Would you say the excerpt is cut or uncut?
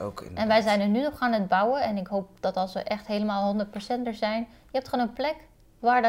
uncut